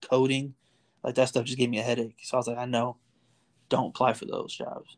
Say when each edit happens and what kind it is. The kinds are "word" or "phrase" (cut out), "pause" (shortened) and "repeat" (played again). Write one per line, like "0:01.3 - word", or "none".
none